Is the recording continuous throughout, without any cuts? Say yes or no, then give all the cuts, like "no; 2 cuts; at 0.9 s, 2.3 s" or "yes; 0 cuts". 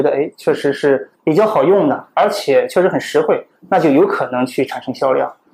no; 1 cut; at 1.1 s